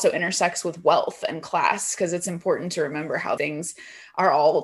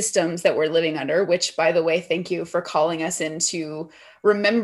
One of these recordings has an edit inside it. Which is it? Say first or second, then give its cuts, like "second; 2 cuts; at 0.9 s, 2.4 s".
first; 1 cut; at 3.4 s